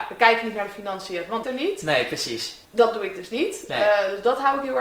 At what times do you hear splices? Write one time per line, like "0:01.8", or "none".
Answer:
0:01.4
0:02.6